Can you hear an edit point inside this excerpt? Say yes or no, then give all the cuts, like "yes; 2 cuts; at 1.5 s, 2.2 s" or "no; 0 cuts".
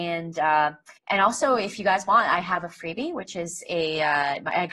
yes; 1 cut; at 1.0 s